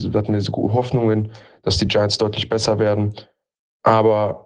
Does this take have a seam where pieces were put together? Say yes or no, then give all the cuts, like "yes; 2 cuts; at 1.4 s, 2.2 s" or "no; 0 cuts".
no; 0 cuts